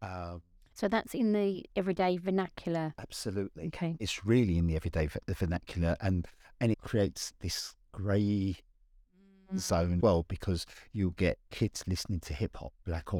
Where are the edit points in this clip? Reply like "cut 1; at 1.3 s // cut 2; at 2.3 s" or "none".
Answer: cut 1; at 6.7 s // cut 2; at 10.0 s // cut 3; at 11.5 s

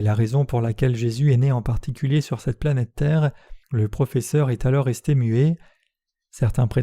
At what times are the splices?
cut 1; at 3.6 s

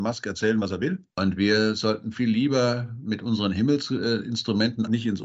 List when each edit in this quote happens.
none

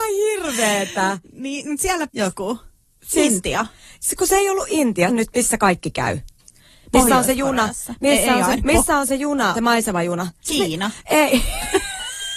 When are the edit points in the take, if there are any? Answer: cut 1; at 2.1 s // cut 2; at 5.1 s // cut 3; at 8.6 s // cut 4; at 9.5 s

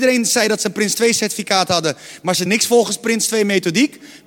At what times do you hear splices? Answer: cut 1; at 2.5 s

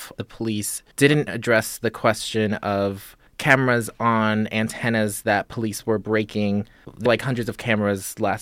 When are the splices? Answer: cut 1; at 0.9 s // cut 2; at 7.1 s

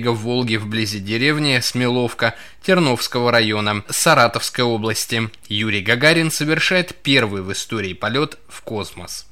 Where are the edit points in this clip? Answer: none

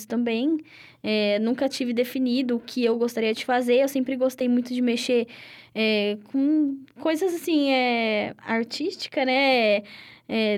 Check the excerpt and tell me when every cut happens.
none

